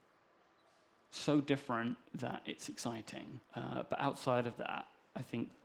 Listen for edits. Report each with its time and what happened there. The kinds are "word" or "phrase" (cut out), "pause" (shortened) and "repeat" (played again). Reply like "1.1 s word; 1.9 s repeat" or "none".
2.1 s pause; 3.5 s pause